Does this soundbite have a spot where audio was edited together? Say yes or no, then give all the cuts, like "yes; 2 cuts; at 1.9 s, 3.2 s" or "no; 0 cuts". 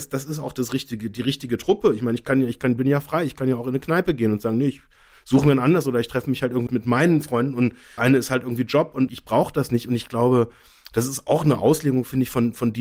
yes; 3 cuts; at 6.7 s, 8.0 s, 9.1 s